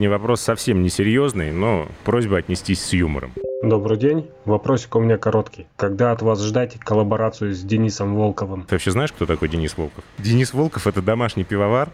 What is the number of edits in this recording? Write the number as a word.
zero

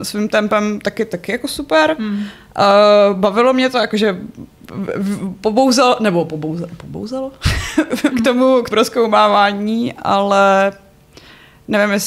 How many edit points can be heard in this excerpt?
two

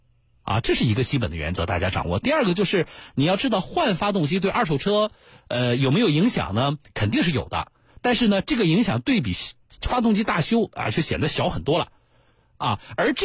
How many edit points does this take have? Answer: zero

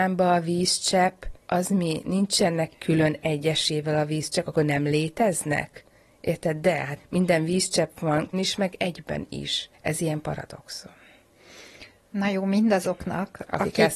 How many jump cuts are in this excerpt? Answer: four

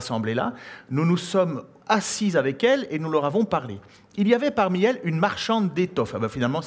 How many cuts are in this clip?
zero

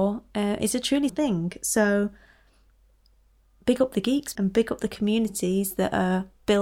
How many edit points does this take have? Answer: two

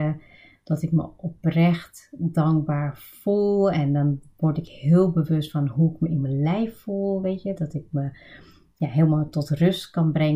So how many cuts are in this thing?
zero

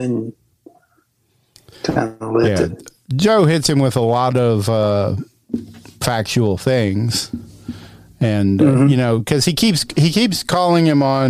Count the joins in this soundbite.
zero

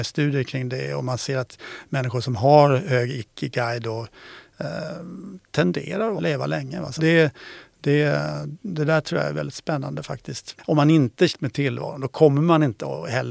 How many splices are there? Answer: three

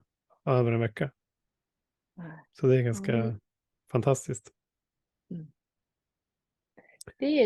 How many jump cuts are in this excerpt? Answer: one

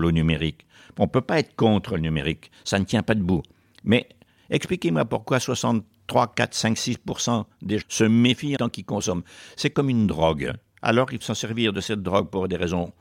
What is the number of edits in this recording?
four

